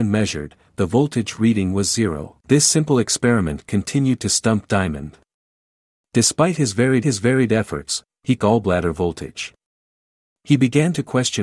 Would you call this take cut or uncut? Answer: cut